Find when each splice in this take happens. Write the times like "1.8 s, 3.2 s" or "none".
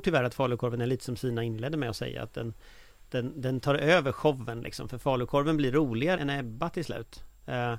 6.2 s